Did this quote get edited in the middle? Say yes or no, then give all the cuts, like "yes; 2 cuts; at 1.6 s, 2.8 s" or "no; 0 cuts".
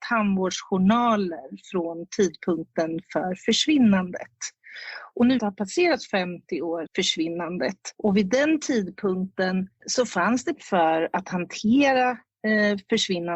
yes; 5 cuts; at 5.4 s, 6.9 s, 7.9 s, 9.8 s, 10.5 s